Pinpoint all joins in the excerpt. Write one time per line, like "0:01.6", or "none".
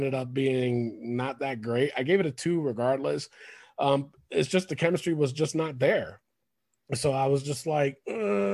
none